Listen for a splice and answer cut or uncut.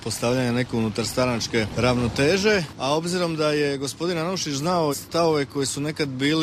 cut